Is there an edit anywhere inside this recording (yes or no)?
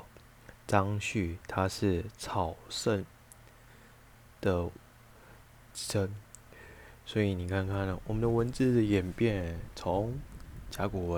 no